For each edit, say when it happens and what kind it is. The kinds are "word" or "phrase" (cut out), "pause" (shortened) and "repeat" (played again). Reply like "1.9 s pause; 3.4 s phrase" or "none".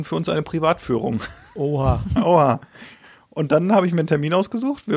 none